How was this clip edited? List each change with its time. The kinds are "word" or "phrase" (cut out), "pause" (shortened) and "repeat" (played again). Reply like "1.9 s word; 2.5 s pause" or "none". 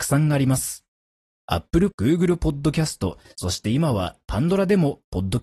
1.9 s word; 3.3 s word